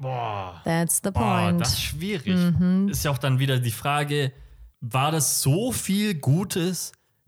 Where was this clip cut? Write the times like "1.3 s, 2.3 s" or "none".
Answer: 4.7 s